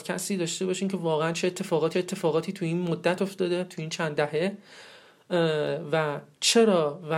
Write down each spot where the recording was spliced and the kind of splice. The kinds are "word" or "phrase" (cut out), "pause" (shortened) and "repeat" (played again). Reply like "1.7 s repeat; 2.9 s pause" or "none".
1.9 s repeat